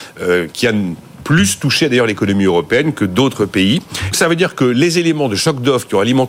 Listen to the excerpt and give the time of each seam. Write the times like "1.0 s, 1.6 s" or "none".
4.1 s